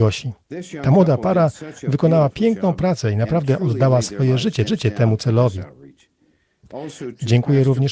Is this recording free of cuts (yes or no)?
no